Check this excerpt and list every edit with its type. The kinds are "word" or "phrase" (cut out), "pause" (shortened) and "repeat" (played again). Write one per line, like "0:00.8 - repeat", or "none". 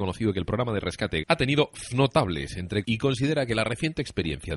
0:01.2 - word
0:01.9 - word
0:02.8 - word